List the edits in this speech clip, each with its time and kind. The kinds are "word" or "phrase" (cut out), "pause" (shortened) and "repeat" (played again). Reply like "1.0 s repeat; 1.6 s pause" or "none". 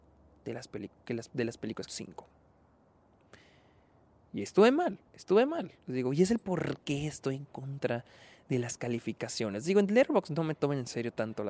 1.9 s phrase; 5.1 s pause; 5.8 s pause